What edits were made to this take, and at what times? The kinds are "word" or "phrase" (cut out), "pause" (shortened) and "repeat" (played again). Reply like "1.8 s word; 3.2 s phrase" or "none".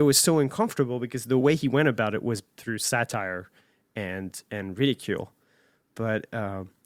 none

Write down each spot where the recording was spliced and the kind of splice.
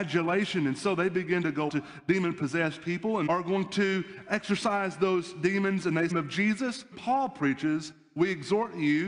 1.7 s word; 3.3 s word; 6.1 s phrase; 6.9 s word

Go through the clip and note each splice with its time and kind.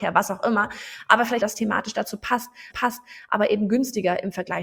1.4 s phrase; 2.7 s repeat

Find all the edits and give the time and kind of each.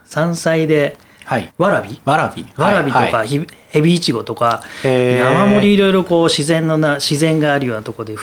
1.5 s pause

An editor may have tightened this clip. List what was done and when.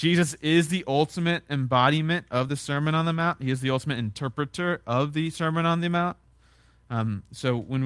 none

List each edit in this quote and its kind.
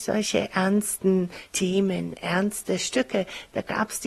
1.5 s pause

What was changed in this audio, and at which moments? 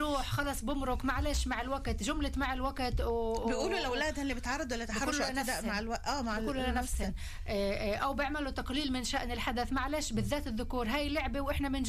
none

